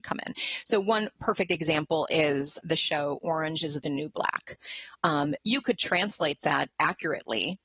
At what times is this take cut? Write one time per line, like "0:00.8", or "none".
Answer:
0:02.6

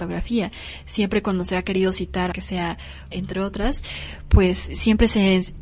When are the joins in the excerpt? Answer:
0:02.3
0:03.1

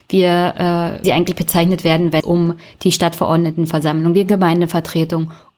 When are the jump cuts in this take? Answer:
0:01.0
0:02.2

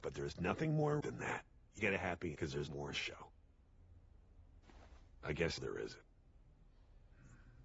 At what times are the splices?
0:01.0
0:01.8
0:02.4
0:02.7
0:05.6

